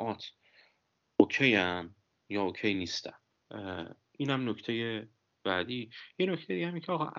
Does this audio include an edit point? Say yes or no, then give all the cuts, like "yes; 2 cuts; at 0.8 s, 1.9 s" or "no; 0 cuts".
no; 0 cuts